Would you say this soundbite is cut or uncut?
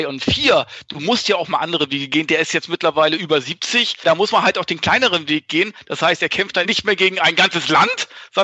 cut